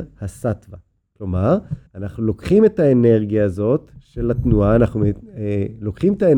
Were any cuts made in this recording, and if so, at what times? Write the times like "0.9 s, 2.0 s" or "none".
1.9 s